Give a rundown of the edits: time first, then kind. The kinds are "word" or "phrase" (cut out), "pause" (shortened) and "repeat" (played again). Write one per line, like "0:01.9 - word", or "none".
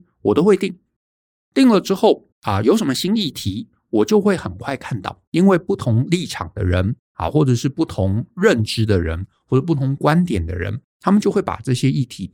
0:02.3 - pause
0:05.2 - pause